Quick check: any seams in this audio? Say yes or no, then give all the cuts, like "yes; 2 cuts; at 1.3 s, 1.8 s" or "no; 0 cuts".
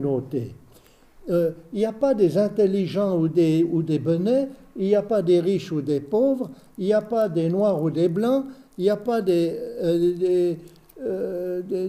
no; 0 cuts